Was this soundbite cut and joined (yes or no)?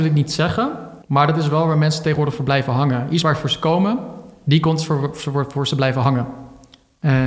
yes